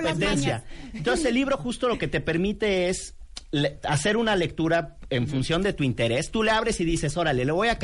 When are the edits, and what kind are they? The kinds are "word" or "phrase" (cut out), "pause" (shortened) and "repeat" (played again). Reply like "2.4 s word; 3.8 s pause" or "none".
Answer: none